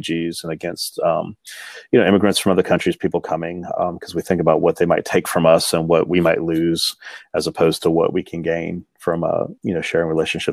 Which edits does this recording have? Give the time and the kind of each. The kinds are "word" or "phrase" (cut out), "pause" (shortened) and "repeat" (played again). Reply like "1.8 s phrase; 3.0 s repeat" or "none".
9.6 s pause